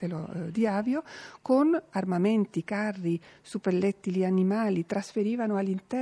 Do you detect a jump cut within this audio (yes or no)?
no